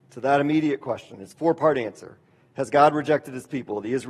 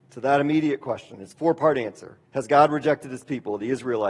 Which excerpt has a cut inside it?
second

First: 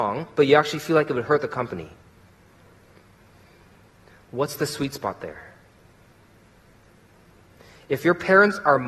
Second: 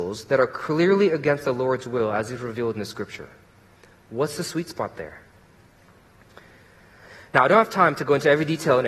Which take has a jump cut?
second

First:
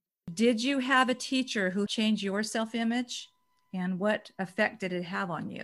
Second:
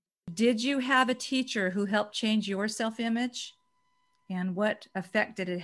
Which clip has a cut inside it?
first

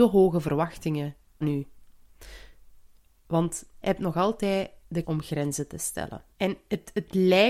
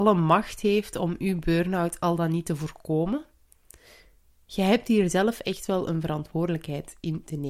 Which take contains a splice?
first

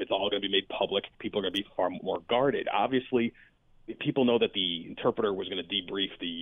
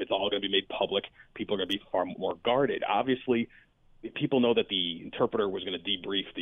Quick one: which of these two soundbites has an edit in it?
first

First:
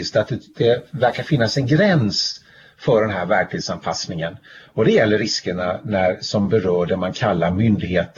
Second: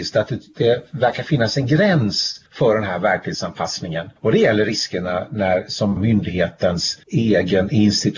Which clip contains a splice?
second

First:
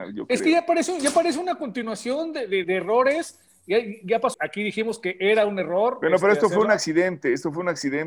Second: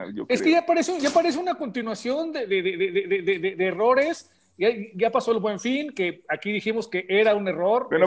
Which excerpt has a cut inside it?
first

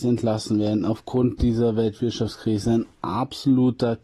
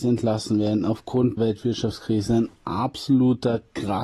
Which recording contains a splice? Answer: second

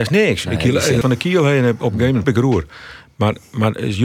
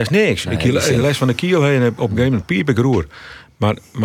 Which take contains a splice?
first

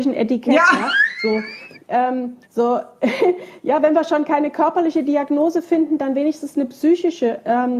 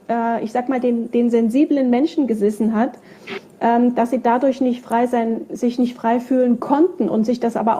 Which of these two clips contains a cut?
first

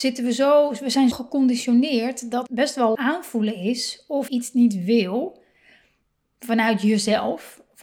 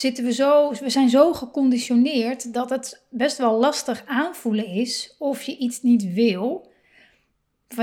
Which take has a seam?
first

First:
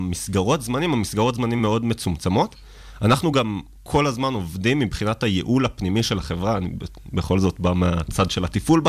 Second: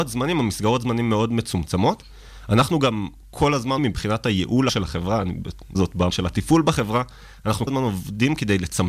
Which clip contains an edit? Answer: second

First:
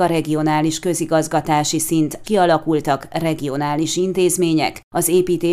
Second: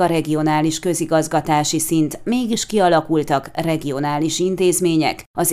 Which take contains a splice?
first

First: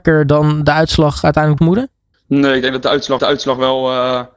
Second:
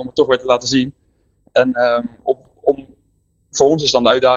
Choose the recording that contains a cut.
first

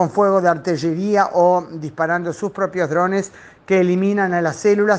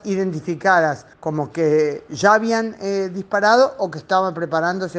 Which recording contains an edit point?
second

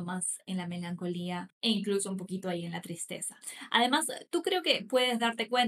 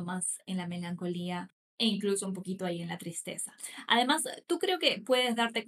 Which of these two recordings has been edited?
first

